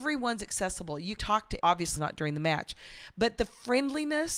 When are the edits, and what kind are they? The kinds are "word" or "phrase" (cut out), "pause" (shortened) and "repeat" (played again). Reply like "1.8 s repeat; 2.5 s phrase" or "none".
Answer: 1.2 s word; 1.6 s word; 2.0 s word